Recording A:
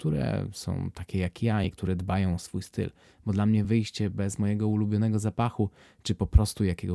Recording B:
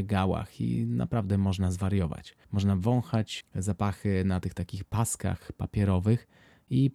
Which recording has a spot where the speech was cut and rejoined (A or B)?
B